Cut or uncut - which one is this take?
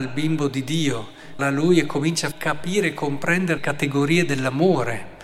cut